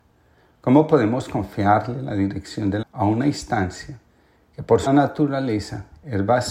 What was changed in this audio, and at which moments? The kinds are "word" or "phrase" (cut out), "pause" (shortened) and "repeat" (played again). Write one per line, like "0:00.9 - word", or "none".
0:02.8 - word
0:04.9 - word